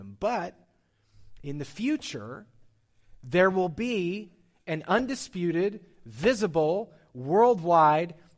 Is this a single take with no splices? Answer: yes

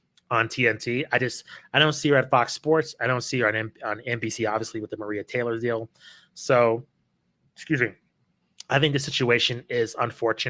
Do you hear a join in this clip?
no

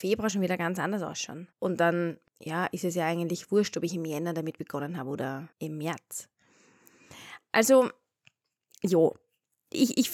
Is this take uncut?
no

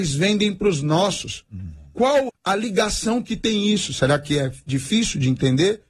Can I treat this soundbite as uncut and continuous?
no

